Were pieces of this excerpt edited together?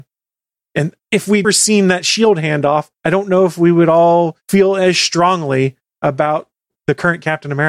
yes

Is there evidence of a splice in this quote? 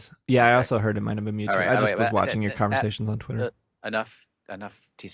no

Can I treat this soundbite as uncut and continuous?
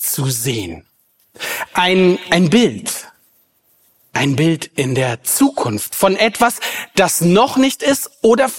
yes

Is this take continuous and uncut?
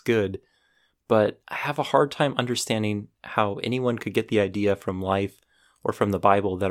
yes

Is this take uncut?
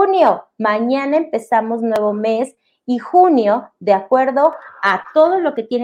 yes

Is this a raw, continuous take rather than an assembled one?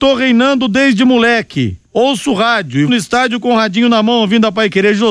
no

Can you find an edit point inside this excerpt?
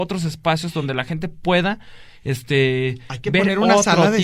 no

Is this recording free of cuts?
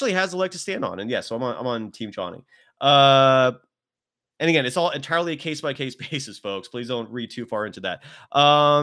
yes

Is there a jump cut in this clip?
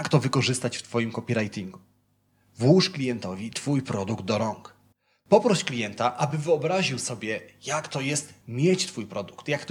no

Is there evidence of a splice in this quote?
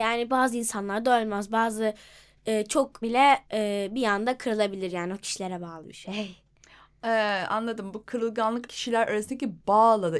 yes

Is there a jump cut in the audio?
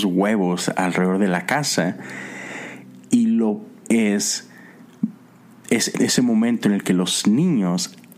yes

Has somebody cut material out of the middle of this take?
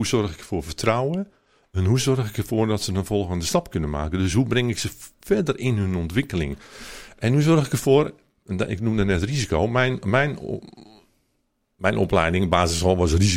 no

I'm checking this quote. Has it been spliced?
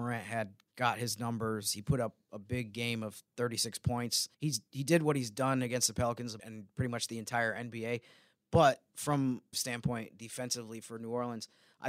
yes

